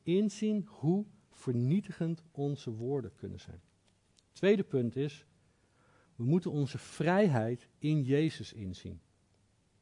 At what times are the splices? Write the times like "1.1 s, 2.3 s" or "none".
none